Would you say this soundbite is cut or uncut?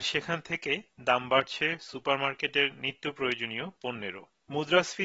uncut